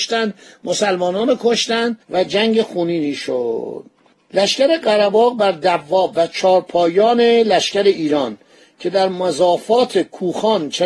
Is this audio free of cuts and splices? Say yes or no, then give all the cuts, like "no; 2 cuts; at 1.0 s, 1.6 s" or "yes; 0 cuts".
no; 1 cut; at 2.0 s